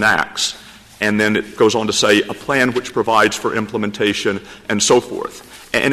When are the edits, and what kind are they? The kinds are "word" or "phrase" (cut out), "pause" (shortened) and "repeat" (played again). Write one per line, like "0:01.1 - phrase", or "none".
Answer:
none